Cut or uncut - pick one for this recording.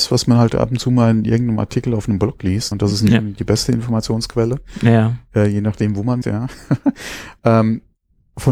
cut